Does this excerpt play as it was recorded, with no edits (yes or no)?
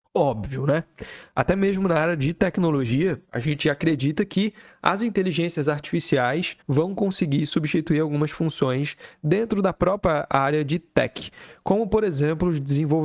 no